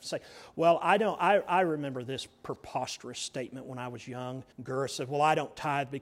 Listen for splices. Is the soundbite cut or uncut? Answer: cut